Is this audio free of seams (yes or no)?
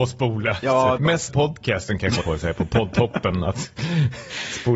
no